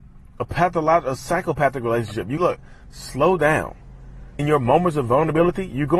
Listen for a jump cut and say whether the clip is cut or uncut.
cut